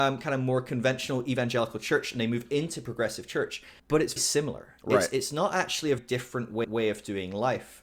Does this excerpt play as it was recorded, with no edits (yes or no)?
no